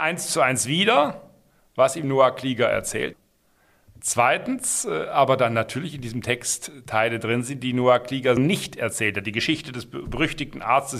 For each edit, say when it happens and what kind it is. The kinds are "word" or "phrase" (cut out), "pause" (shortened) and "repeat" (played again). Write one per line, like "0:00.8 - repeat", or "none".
0:03.1 - word
0:08.4 - word